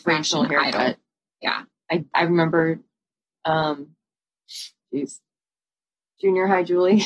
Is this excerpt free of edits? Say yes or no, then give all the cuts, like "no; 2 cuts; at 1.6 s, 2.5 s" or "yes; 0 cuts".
no; 1 cut; at 2.1 s